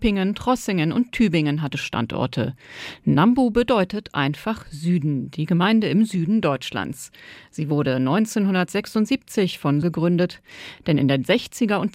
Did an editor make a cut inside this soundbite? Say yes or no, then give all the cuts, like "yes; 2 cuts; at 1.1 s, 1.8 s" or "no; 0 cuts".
yes; 2 cuts; at 1.7 s, 9.8 s